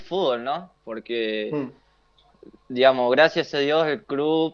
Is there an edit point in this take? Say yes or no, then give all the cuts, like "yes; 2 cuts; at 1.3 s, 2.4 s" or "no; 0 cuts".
no; 0 cuts